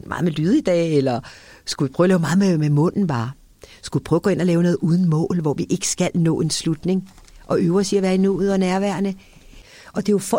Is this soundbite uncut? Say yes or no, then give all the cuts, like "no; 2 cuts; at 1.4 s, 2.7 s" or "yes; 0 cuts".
yes; 0 cuts